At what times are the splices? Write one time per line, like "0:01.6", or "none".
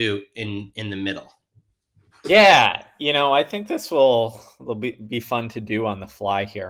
none